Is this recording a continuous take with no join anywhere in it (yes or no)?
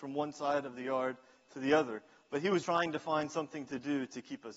no